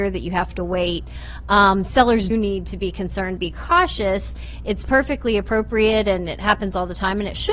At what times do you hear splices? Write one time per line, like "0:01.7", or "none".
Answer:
0:02.3
0:03.4